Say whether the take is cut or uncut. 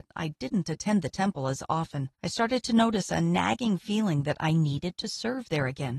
cut